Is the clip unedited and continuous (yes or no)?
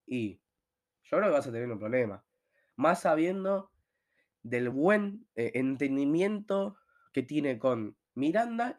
yes